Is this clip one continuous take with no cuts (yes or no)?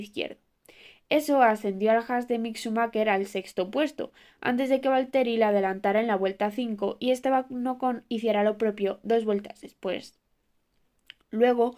yes